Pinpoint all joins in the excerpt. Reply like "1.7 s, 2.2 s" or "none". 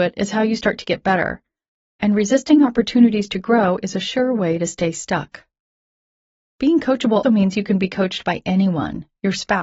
7.2 s